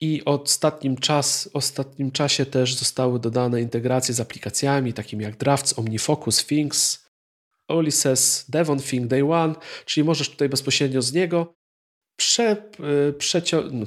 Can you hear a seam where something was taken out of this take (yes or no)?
no